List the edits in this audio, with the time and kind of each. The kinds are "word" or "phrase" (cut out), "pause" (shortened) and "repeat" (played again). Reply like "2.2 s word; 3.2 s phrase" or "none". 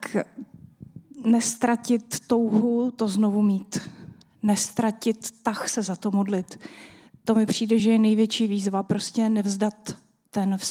none